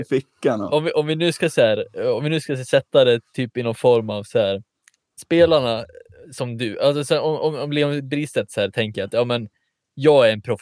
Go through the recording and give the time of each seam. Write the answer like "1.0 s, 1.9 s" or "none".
none